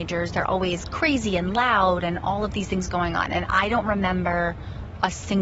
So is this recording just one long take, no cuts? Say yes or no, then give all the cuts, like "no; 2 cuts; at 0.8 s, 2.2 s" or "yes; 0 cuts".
yes; 0 cuts